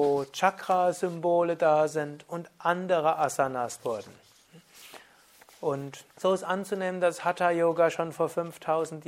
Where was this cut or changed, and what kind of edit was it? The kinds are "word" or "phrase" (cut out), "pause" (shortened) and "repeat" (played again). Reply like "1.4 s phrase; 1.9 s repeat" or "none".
3.8 s word; 6.1 s pause